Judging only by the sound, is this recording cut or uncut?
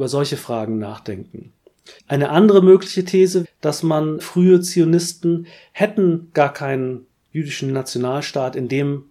cut